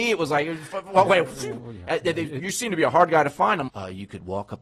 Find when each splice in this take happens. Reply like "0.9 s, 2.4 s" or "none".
3.7 s